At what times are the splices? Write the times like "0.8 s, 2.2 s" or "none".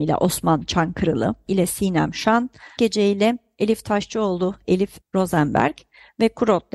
1.5 s, 2.8 s, 4.6 s, 5.0 s